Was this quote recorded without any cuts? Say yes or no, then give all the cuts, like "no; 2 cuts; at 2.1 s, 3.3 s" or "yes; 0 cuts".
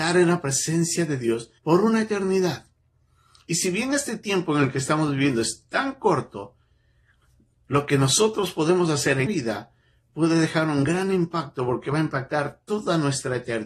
no; 2 cuts; at 1.6 s, 9.2 s